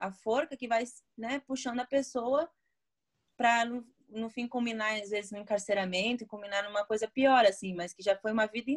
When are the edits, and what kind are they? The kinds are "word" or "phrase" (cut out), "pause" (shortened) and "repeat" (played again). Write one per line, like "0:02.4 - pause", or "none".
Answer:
none